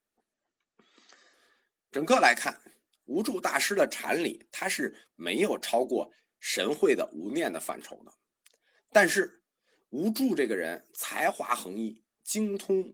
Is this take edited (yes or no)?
no